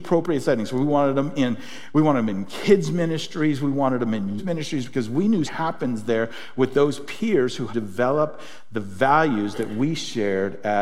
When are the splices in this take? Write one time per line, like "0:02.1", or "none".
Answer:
0:04.4
0:05.5
0:07.7